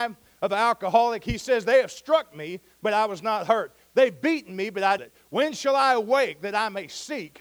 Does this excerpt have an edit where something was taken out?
yes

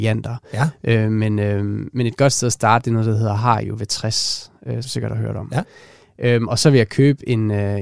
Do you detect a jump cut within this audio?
yes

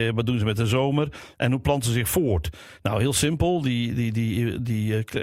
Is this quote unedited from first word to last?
yes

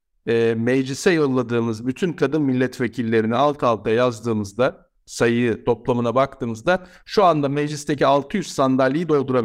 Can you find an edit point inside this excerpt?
no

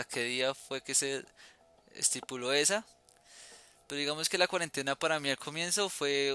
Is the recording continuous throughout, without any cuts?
yes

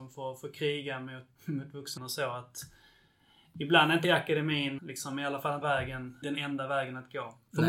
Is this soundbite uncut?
no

